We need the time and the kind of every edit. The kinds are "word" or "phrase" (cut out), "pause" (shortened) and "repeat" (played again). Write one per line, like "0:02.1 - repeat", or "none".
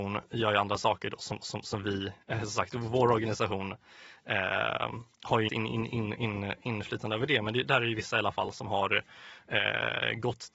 0:01.4 - repeat
0:05.1 - pause
0:05.5 - word